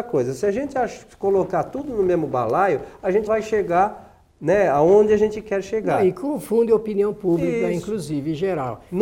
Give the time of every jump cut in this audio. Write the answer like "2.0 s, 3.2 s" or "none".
3.3 s